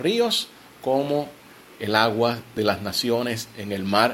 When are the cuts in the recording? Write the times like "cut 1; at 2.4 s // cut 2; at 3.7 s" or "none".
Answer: none